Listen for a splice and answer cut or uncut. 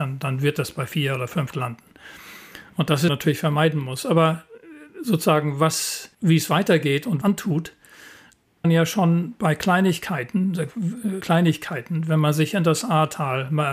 cut